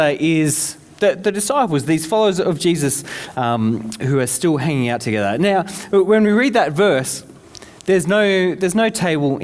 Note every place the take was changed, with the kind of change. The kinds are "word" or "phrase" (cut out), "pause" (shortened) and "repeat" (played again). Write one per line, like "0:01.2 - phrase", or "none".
none